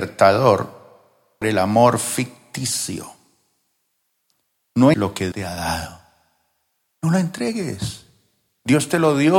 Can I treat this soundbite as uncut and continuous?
no; 3 cuts; at 1.4 s, 4.9 s, 5.3 s

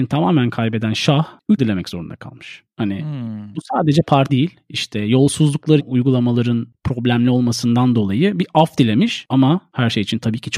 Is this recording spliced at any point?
yes; 3 cuts; at 1.6 s, 4.3 s, 5.8 s

